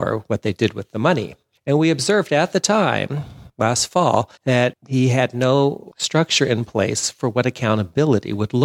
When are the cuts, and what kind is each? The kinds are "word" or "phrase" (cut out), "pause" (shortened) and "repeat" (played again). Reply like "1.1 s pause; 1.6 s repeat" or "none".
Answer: 4.4 s pause